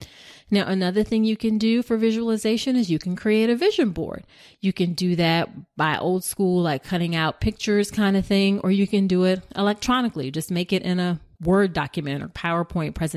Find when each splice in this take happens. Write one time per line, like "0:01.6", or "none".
none